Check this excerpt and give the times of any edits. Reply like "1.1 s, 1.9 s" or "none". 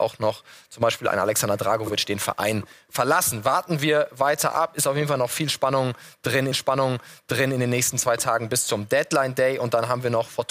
6.5 s